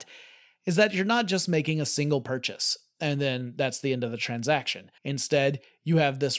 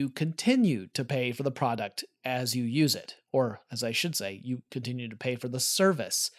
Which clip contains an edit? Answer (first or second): first